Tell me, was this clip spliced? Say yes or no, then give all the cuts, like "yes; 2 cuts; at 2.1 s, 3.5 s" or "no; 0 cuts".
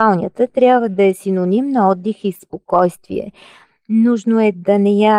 no; 0 cuts